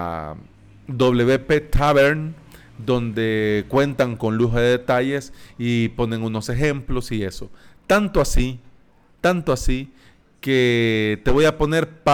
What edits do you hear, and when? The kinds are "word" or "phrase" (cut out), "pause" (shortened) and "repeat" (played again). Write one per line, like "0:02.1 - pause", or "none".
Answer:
none